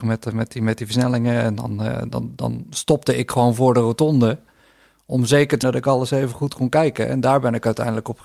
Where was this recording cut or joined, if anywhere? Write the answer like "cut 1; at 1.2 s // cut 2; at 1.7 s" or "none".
cut 1; at 5.6 s